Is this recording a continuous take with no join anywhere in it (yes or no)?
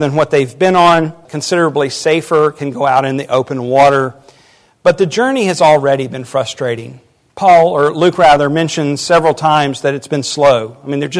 no